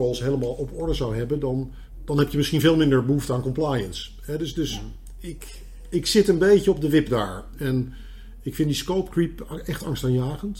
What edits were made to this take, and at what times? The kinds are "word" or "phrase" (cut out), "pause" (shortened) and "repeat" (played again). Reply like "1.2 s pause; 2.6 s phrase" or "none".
none